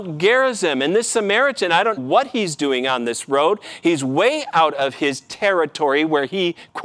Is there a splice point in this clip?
yes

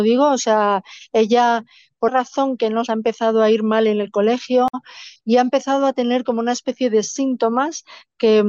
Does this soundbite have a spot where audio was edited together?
yes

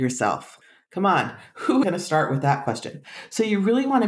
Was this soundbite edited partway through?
yes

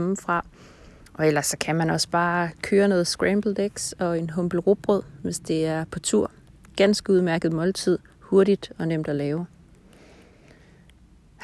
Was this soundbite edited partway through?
no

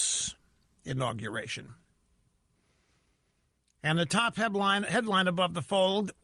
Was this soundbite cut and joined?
no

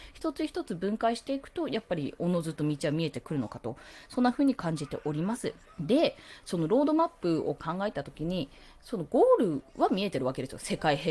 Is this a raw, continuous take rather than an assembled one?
no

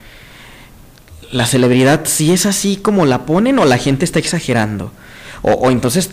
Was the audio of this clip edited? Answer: no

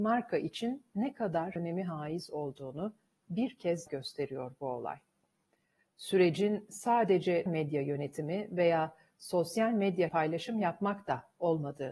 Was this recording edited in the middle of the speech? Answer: yes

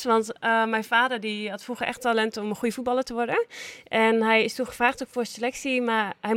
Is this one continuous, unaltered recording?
yes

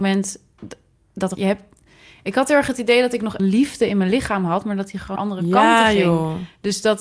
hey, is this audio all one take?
no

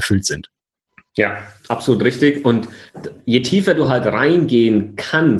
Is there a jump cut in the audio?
no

